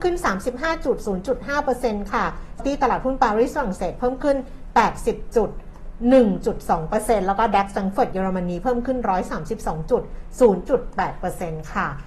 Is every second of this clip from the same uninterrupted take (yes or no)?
no